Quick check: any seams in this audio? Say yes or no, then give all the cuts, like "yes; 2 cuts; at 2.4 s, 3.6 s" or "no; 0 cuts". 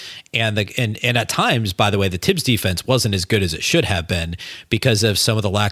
no; 0 cuts